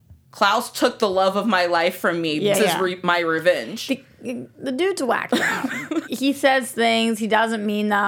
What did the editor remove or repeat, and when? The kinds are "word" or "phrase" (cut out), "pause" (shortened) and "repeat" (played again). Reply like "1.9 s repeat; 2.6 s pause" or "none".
2.5 s word; 6.1 s word

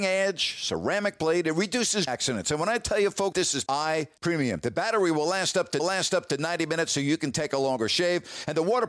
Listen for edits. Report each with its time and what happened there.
2.1 s word; 3.3 s word; 3.7 s word; 4.2 s word; 5.8 s repeat

